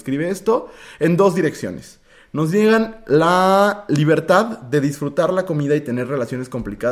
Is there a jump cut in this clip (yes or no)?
no